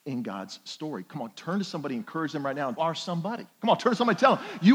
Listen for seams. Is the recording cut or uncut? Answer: cut